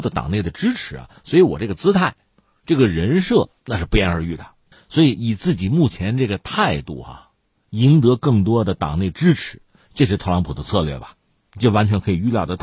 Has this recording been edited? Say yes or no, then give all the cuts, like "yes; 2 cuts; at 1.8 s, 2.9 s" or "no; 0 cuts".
yes; 1 cut; at 3.6 s